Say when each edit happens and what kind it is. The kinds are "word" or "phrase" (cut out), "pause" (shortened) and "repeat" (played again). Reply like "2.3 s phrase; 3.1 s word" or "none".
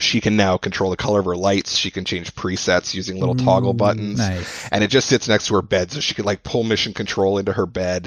none